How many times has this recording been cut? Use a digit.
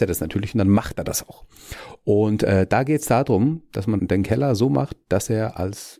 1